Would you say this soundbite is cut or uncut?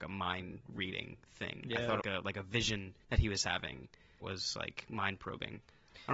cut